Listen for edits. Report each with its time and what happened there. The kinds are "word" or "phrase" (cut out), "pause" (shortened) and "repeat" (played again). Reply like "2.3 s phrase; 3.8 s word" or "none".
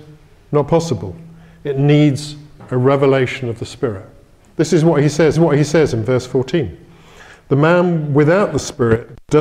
5.4 s repeat